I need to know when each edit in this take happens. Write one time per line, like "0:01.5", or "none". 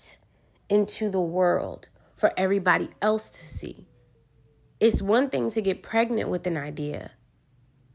none